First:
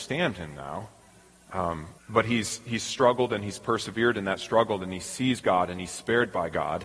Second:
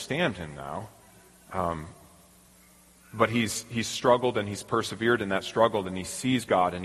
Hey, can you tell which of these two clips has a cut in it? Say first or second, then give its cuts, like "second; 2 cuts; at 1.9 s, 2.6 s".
first; 1 cut; at 2.0 s